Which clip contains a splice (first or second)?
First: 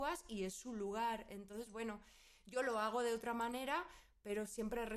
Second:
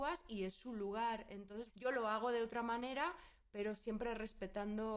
second